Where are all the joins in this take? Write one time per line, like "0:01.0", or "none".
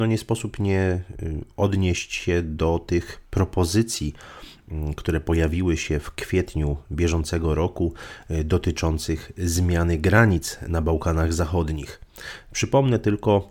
0:03.2